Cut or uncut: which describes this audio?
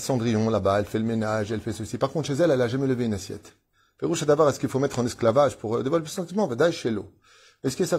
cut